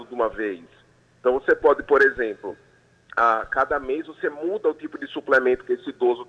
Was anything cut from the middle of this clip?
no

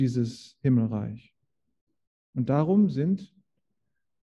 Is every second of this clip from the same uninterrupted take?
yes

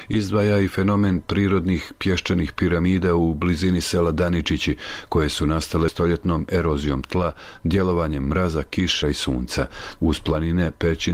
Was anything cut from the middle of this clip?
yes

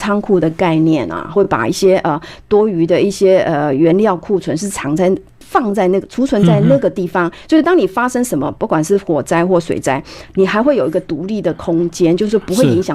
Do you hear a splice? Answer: no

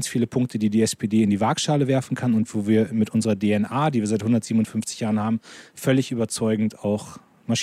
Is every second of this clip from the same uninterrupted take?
yes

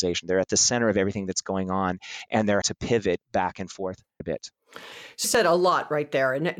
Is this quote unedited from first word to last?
no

